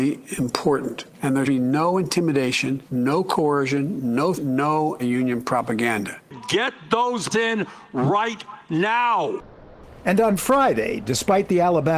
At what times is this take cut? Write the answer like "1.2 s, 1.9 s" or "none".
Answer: 1.1 s, 1.4 s, 2.9 s, 4.3 s, 5.0 s, 7.3 s